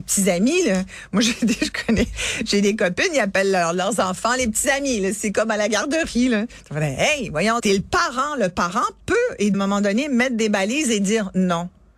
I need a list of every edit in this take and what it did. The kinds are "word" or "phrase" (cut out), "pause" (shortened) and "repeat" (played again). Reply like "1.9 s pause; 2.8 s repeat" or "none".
7.6 s word; 9.5 s phrase